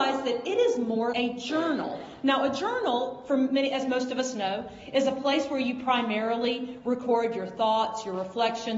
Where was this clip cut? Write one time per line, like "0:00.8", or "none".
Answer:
0:01.1